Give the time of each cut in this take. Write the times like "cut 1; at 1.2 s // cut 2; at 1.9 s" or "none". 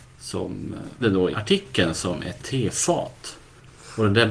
cut 1; at 1.0 s // cut 2; at 1.3 s // cut 3; at 2.4 s